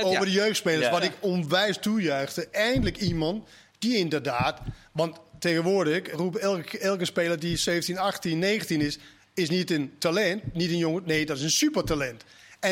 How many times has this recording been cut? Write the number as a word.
one